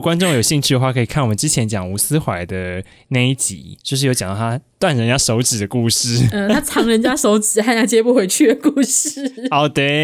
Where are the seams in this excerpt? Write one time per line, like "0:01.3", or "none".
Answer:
0:03.8

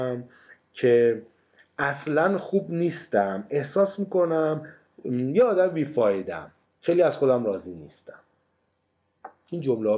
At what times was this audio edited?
0:06.6

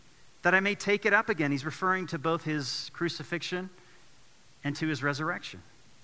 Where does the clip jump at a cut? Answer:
none

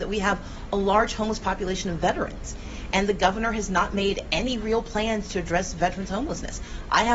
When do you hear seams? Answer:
none

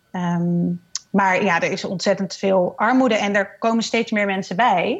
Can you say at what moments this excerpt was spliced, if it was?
none

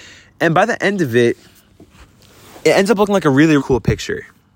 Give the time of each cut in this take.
0:03.6

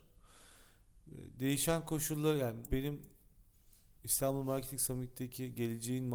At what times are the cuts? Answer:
0:02.7

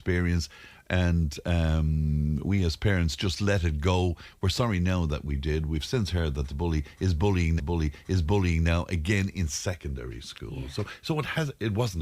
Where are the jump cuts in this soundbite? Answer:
0:07.6

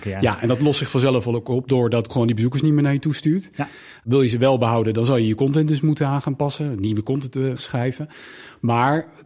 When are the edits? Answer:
0:02.1
0:07.6

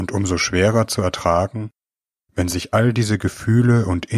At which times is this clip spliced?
none

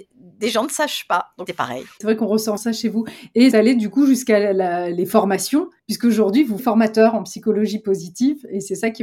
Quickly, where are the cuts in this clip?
0:01.5
0:02.6
0:03.5
0:05.8
0:06.6

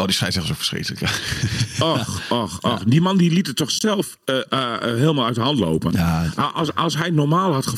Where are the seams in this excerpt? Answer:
none

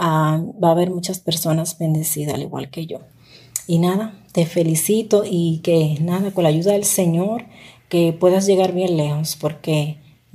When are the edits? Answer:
none

